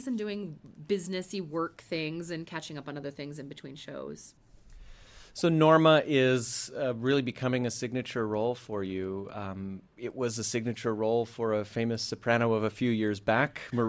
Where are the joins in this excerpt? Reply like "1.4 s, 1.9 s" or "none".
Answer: 9.9 s